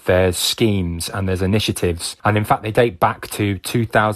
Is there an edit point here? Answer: yes; 1 cut; at 2.2 s

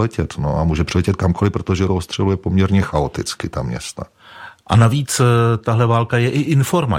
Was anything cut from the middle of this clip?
yes; 1 cut; at 1.9 s

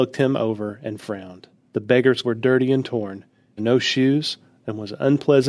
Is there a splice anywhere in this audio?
yes; 3 cuts; at 1.5 s, 2.2 s, 3.6 s

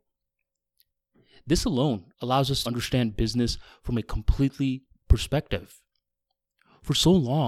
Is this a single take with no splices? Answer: no; 3 cuts; at 2.1 s, 2.6 s, 5.0 s

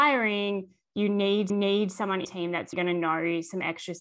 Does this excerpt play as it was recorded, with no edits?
no; 3 cuts; at 1.5 s, 2.2 s, 2.7 s

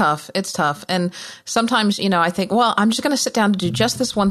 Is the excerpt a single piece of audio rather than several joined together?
yes; 0 cuts

